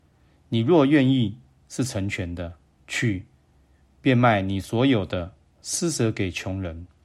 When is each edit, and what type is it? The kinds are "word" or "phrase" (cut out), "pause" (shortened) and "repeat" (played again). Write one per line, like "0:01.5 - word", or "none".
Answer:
0:02.6 - pause